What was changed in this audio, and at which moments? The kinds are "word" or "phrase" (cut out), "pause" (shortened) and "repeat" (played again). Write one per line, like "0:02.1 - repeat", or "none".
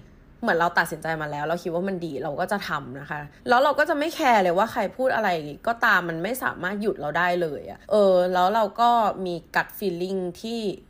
0:03.4 - pause
0:07.8 - pause

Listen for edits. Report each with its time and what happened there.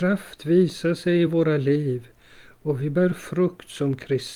none

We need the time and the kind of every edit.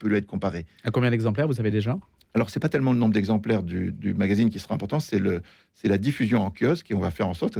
none

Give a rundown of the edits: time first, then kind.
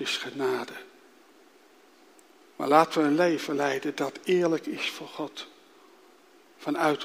none

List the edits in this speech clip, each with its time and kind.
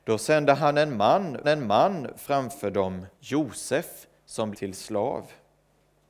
0:01.4 - repeat
0:03.1 - pause
0:04.5 - phrase

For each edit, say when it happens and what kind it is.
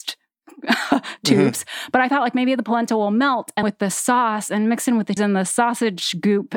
0:03.6 - phrase
0:05.2 - word

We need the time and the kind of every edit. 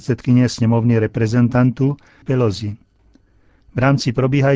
0:02.2 - word

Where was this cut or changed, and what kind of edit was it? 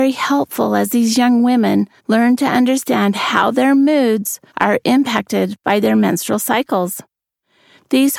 0:02.0 - pause
0:04.5 - pause

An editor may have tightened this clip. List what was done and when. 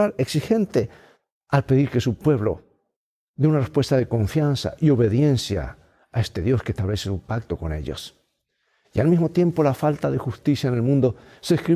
none

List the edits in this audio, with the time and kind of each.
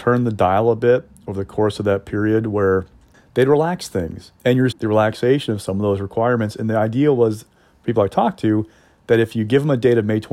0:04.4 - pause
0:04.7 - word

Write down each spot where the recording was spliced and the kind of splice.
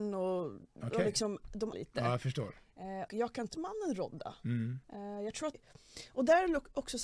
0:01.7 - word
0:03.1 - word
0:03.5 - phrase
0:04.8 - pause
0:05.5 - word

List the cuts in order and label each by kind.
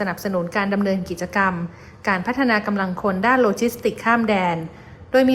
none

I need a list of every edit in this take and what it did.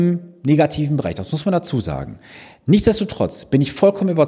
none

